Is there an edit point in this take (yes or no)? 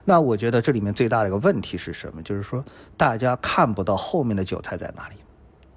no